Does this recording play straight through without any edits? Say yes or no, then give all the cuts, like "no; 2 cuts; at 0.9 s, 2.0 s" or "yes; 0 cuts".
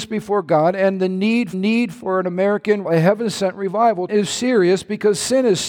no; 3 cuts; at 1.5 s, 2.8 s, 4.1 s